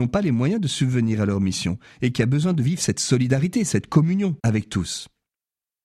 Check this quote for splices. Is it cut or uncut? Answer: cut